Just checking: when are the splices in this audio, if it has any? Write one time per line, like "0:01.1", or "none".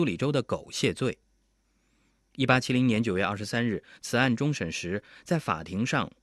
none